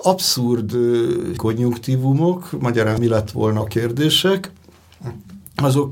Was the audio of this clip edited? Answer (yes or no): yes